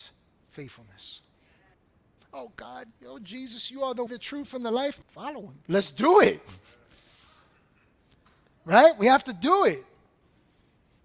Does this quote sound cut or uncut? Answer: cut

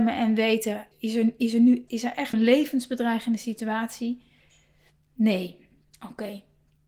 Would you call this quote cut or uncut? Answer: cut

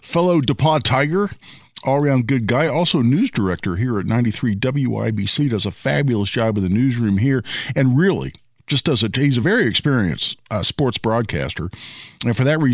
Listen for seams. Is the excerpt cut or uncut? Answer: uncut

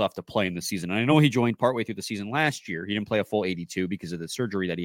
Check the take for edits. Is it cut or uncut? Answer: uncut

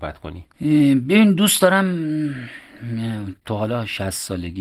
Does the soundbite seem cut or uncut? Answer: uncut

